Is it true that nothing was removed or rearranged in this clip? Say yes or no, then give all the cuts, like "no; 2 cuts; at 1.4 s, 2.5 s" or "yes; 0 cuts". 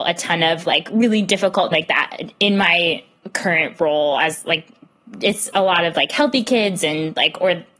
no; 1 cut; at 1.7 s